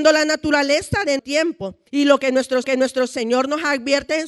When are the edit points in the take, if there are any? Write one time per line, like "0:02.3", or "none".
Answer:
0:01.2
0:01.9
0:02.6